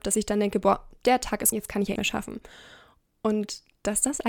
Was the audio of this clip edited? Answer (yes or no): yes